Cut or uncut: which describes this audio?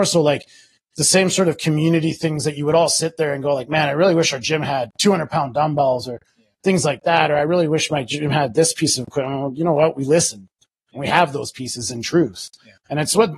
uncut